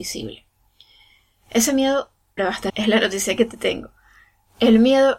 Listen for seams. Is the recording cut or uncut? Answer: cut